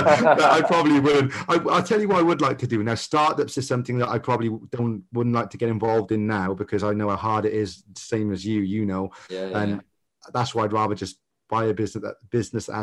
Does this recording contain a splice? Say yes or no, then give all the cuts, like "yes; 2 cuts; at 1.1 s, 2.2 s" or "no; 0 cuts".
no; 0 cuts